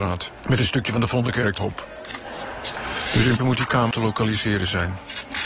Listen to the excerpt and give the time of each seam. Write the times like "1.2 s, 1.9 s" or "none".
1.6 s, 3.4 s, 3.9 s